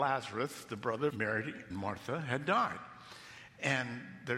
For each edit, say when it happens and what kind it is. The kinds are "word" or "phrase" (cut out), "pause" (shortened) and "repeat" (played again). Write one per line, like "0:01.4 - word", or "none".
0:01.1 - word
0:01.7 - word